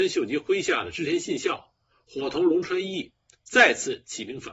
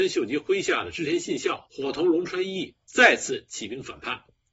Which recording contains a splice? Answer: second; 2 cuts; at 1.6 s, 2.8 s

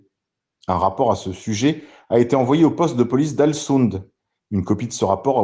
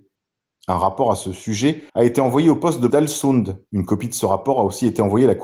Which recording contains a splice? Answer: second; 3 cuts; at 1.9 s, 2.9 s, 3.7 s

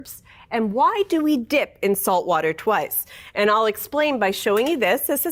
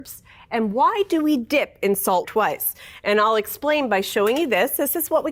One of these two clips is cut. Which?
second; 1 cut; at 2.2 s

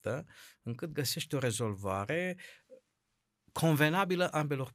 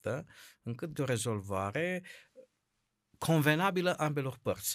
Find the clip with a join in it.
second; 1 cut; at 0.9 s

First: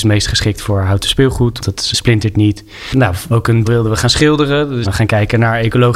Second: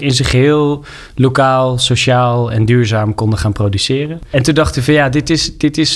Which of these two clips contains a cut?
first; 5 cuts; at 1.6 s, 1.9 s, 3.3 s, 3.6 s, 4.8 s

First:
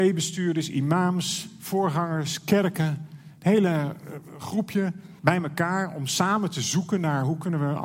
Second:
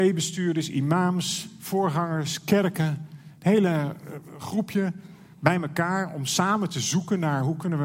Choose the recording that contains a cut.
first; 1 cut; at 5.2 s

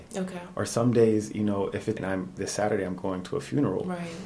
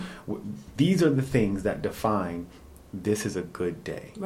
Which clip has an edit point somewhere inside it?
first; 2 cuts; at 2.0 s, 2.4 s

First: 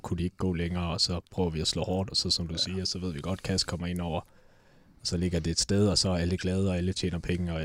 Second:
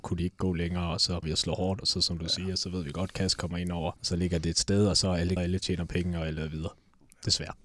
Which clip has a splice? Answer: second; 3 cuts; at 1.2 s, 4.0 s, 5.4 s

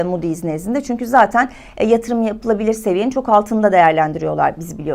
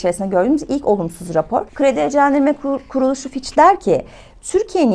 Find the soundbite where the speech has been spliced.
second; 1 cut; at 1.7 s

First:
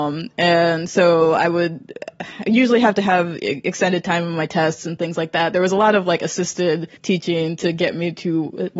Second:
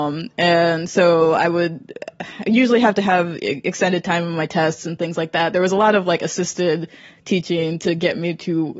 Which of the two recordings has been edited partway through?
first; 1 cut; at 7.0 s

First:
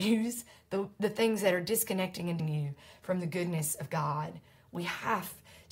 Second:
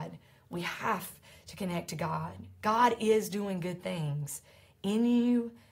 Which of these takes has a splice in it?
first; 1 cut; at 2.4 s

